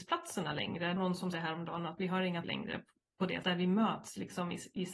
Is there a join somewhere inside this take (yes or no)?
yes